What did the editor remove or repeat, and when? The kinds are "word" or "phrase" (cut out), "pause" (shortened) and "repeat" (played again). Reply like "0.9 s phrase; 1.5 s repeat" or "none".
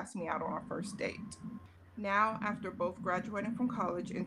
none